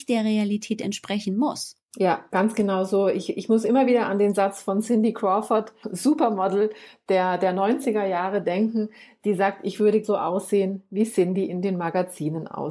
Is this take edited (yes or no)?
yes